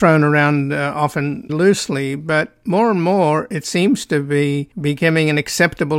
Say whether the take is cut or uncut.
cut